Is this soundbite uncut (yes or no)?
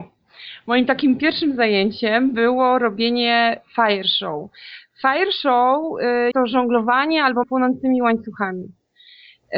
no